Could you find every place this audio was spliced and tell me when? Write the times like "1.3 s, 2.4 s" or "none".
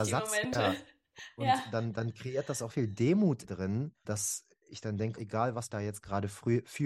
2.7 s, 3.4 s, 4.0 s, 5.2 s, 5.7 s

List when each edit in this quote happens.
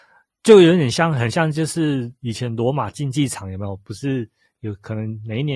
none

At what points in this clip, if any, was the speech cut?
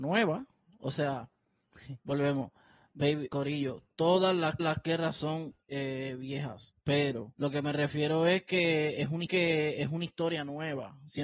2.0 s, 3.3 s, 4.6 s, 5.6 s, 7.3 s, 9.2 s

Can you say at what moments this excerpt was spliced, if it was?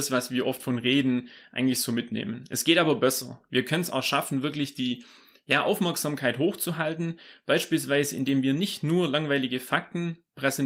none

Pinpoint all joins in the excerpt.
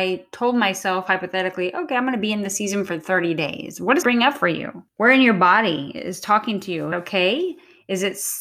4.0 s, 4.9 s, 6.9 s

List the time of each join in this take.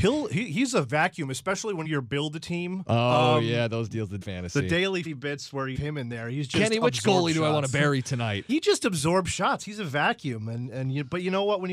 1.8 s, 4.2 s, 5.0 s, 5.7 s, 8.5 s

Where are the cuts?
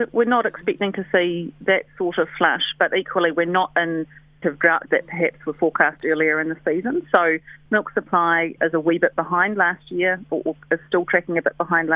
4.4 s, 4.9 s, 8.6 s, 10.3 s

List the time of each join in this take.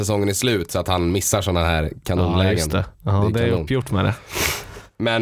none

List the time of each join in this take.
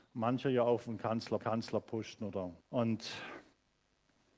1.4 s, 2.6 s

